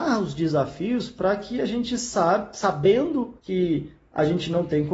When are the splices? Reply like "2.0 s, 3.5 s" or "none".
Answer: 3.4 s